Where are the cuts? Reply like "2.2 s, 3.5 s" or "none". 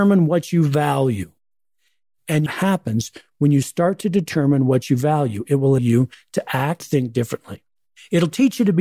2.5 s, 5.8 s, 6.8 s